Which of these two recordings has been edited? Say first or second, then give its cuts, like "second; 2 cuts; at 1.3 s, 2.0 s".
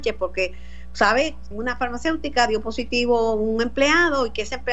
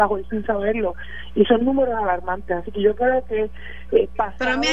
first; 1 cut; at 1.5 s